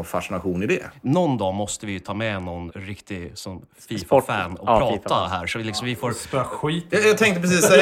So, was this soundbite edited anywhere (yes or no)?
yes